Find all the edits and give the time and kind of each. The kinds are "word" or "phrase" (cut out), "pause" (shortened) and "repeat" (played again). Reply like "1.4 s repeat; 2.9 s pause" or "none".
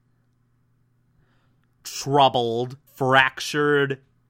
2.9 s pause